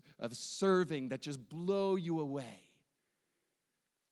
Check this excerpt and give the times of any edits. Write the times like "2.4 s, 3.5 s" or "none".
none